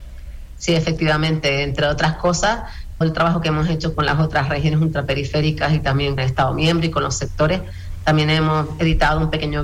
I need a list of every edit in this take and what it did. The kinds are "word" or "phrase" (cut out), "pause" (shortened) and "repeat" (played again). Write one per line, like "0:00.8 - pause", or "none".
0:03.0 - word
0:03.9 - word
0:06.2 - word